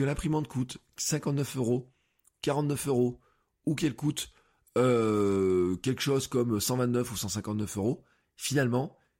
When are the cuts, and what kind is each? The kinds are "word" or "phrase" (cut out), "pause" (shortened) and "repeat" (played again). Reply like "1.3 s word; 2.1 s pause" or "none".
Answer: none